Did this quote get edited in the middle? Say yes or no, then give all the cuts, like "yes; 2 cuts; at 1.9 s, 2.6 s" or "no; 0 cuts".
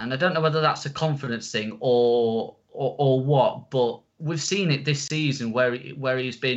no; 0 cuts